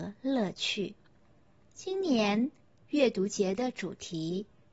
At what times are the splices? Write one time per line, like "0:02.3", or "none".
0:01.2